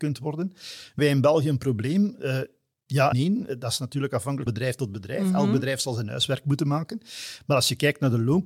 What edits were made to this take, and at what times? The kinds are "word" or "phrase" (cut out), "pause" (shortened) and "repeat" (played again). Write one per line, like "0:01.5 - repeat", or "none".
0:01.0 - word
0:03.1 - word
0:04.5 - word

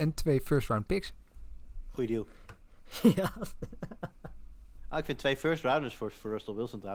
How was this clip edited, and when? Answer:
none

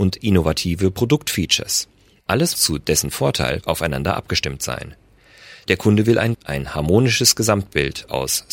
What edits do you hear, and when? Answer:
0:02.5 - word
0:03.6 - word
0:06.3 - word

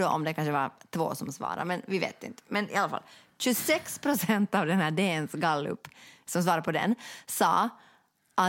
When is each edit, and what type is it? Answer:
none

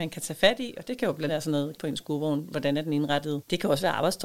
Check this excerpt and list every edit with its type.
0:01.3 - word
0:01.8 - word

